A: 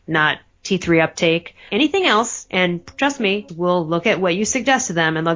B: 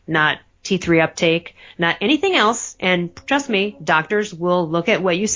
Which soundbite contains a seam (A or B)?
A